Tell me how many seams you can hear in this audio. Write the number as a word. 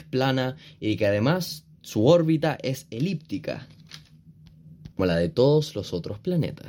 one